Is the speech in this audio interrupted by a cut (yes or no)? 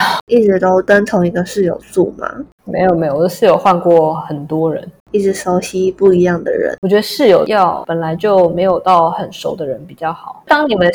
yes